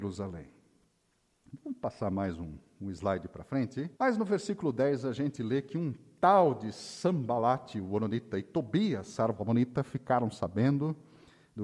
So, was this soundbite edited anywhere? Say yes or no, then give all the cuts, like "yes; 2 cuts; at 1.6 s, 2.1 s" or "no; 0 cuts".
yes; 1 cut; at 3.9 s